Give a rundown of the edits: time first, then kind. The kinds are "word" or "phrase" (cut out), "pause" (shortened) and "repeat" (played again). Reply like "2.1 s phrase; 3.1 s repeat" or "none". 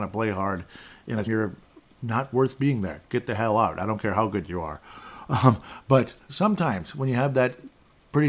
1.3 s phrase; 6.3 s word